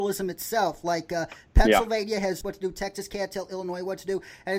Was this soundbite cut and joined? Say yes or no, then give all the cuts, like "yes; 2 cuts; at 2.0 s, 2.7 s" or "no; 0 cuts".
yes; 1 cut; at 2.4 s